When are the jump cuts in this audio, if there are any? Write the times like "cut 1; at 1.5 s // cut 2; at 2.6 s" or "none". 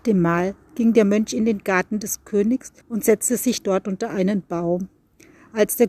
cut 1; at 2.8 s